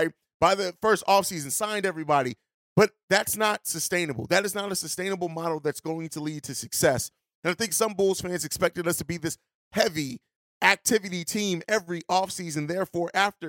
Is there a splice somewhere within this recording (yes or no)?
no